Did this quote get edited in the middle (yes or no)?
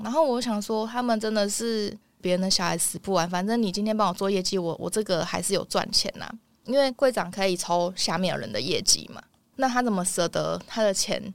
no